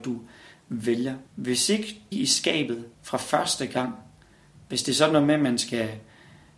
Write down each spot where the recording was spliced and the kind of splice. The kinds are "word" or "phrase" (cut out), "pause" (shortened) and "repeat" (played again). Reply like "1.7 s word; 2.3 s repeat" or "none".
1.3 s pause; 2.1 s phrase; 2.9 s pause